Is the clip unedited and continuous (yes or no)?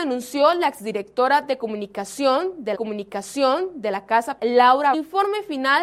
no